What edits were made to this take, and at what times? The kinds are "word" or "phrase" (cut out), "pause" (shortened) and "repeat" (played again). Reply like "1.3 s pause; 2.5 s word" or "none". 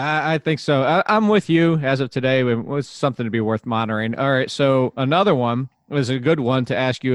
none